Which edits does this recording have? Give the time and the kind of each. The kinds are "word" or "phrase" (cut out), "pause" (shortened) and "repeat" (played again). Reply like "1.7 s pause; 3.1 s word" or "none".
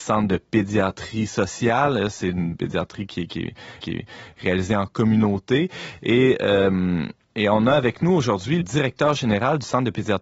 3.8 s repeat; 8.6 s word